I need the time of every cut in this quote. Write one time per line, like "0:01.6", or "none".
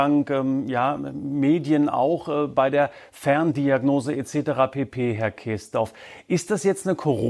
none